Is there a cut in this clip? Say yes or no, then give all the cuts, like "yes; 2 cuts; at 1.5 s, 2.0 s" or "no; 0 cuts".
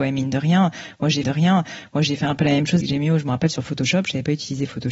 yes; 2 cuts; at 1.2 s, 2.8 s